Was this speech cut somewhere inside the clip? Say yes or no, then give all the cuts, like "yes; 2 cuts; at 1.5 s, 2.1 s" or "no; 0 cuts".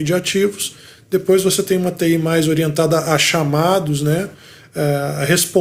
no; 0 cuts